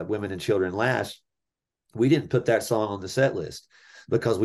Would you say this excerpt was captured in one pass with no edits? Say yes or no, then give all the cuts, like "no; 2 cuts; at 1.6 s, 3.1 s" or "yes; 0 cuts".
yes; 0 cuts